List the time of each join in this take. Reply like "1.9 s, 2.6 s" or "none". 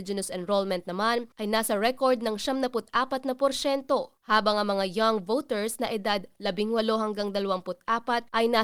1.3 s